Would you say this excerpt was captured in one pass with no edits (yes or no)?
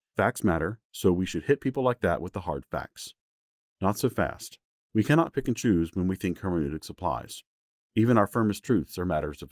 yes